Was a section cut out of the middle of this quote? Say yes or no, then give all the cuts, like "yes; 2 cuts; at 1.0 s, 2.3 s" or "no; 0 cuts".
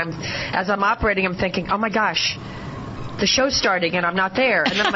no; 0 cuts